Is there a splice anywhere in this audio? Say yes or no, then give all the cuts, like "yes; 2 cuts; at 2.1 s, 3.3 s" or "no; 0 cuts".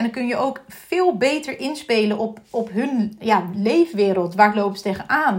no; 0 cuts